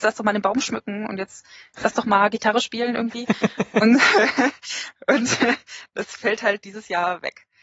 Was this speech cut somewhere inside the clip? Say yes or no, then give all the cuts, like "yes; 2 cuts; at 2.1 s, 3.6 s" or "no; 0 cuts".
no; 0 cuts